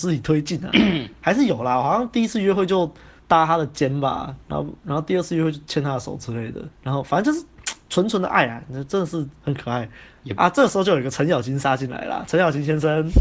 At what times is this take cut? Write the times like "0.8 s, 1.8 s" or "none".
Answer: 3.2 s, 4.4 s, 6.7 s